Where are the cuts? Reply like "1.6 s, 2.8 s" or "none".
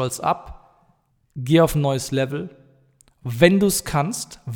1.1 s